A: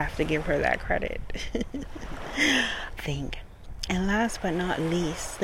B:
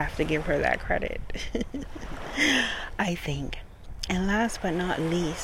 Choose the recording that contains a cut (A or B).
A